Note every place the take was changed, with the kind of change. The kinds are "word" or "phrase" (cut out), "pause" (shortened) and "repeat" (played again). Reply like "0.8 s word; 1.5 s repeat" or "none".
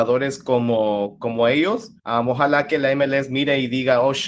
2.0 s pause